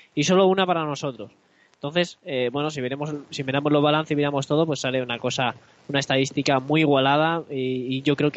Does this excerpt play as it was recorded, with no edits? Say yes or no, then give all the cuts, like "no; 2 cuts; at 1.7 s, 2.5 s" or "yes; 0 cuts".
yes; 0 cuts